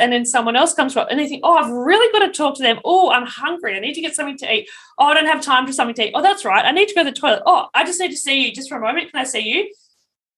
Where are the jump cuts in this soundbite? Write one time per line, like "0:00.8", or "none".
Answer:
none